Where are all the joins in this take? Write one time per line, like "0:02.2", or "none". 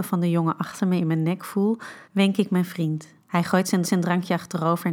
0:02.0
0:03.2
0:03.8